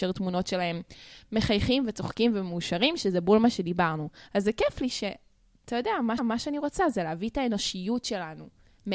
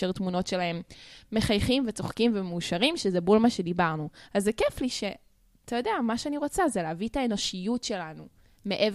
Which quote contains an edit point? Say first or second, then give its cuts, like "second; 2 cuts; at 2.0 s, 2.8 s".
first; 1 cut; at 6.2 s